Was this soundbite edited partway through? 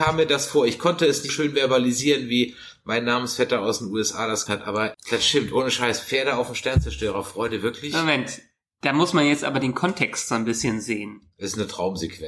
yes; 3 cuts; at 1.3 s, 4.5 s, 4.9 s

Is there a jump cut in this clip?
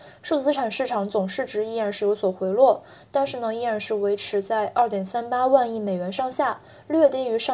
no; 0 cuts

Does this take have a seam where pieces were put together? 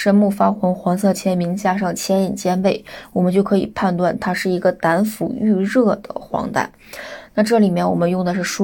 no; 0 cuts

